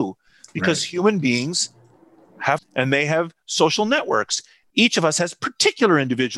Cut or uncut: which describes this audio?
cut